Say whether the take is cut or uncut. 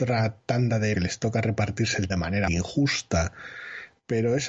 cut